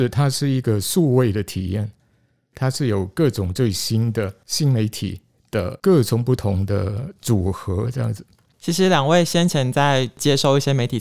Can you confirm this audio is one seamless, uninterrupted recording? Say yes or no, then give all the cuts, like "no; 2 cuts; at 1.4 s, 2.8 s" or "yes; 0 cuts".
yes; 0 cuts